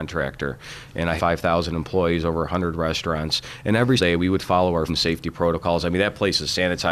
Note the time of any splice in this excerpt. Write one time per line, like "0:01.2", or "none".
0:01.2
0:04.0
0:04.9